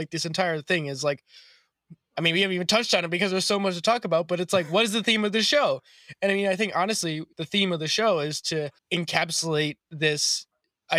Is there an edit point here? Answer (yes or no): yes